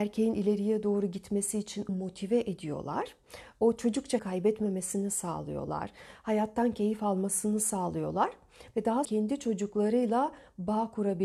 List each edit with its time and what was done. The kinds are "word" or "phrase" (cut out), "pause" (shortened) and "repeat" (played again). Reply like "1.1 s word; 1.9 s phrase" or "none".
1.9 s word; 4.2 s word; 9.0 s phrase